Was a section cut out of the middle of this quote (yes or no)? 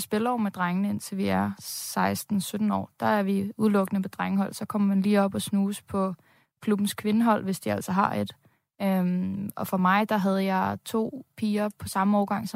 no